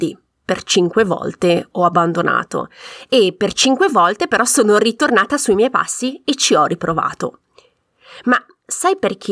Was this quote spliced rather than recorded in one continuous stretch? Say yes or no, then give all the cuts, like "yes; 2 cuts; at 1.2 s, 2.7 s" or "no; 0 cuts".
no; 0 cuts